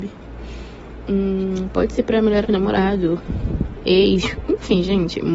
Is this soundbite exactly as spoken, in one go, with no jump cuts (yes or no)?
no